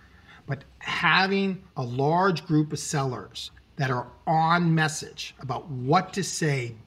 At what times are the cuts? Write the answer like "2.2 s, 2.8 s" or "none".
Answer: 1.7 s